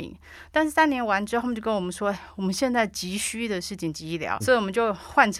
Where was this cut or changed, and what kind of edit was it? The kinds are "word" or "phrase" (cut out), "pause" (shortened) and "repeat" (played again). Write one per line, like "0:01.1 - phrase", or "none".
0:04.4 - word